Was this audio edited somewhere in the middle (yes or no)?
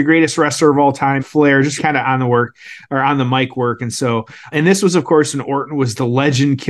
yes